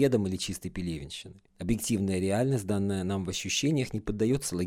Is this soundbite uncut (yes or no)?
no